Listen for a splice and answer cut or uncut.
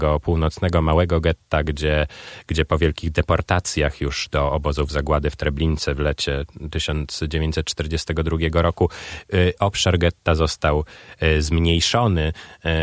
uncut